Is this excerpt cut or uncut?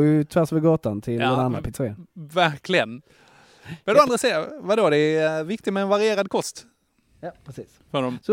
uncut